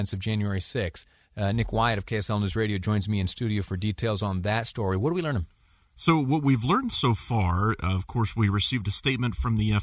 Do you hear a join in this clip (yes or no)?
no